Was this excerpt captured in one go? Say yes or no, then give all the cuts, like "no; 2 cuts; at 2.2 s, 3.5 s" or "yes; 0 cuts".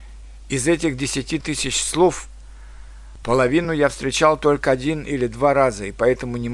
yes; 0 cuts